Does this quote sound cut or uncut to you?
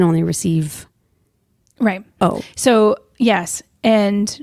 uncut